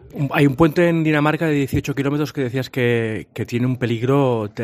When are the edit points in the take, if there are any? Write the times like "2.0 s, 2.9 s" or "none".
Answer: none